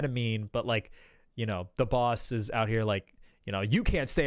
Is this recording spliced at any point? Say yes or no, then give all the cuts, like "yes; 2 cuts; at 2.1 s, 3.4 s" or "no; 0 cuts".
no; 0 cuts